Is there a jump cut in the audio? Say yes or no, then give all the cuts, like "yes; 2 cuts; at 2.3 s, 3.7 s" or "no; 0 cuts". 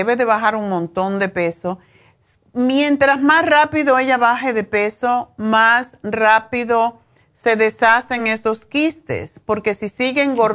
no; 0 cuts